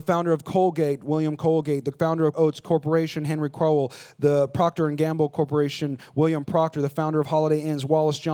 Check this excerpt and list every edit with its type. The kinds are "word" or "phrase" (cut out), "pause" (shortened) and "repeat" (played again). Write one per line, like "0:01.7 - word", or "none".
0:02.3 - word